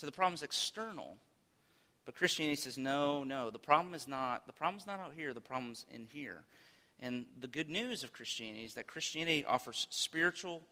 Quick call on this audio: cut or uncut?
uncut